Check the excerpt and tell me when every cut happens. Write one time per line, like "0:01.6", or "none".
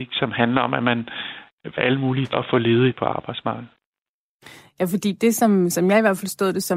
0:01.8
0:02.3
0:02.9